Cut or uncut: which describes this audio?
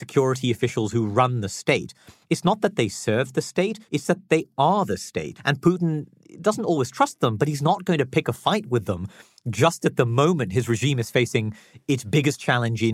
cut